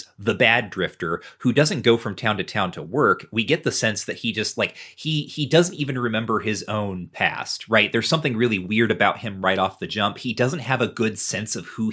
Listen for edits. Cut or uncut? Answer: uncut